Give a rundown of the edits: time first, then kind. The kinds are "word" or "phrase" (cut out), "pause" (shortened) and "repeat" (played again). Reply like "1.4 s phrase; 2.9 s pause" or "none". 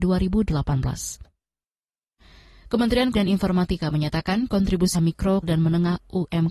3.1 s word; 4.9 s word; 5.4 s word